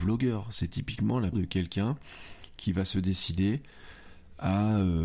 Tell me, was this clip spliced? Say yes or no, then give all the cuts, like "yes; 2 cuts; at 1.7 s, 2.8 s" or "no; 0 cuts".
yes; 1 cut; at 1.3 s